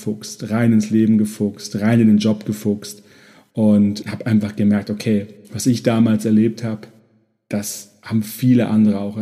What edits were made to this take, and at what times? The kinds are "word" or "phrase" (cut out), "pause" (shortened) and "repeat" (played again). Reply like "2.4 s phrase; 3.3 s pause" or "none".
4.0 s word